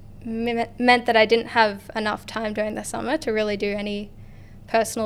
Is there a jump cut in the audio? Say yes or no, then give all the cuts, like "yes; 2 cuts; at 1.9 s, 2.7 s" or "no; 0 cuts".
no; 0 cuts